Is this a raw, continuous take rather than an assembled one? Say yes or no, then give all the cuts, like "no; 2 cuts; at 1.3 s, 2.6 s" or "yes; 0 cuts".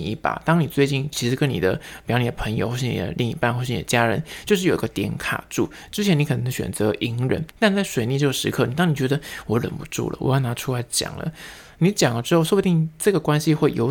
no; 1 cut; at 7.5 s